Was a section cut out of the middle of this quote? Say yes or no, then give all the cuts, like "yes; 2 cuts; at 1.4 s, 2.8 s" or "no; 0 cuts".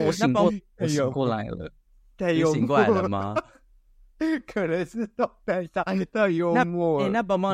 no; 0 cuts